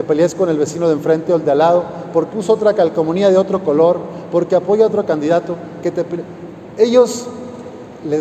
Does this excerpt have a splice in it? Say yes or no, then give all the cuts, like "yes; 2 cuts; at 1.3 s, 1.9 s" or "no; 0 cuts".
yes; 1 cut; at 2.3 s